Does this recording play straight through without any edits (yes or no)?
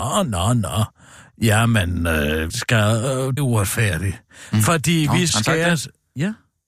no